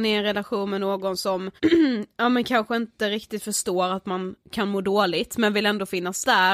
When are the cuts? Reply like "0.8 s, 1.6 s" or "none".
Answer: 1.6 s, 4.4 s